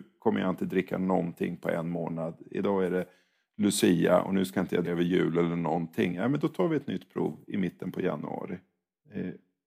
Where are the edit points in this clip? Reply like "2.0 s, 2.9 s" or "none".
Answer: 4.8 s